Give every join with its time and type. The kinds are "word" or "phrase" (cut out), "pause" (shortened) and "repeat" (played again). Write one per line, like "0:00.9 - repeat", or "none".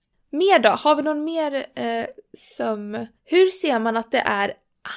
0:03.2 - pause